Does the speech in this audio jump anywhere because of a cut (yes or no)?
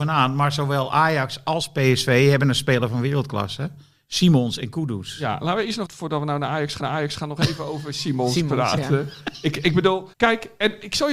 yes